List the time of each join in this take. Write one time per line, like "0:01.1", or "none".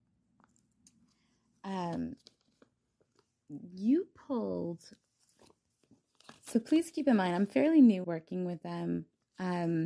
0:08.0